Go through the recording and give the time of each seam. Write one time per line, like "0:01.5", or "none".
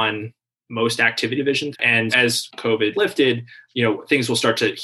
0:01.4
0:01.7
0:02.1
0:02.9